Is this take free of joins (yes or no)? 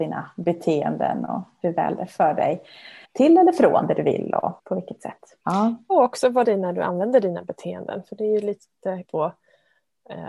no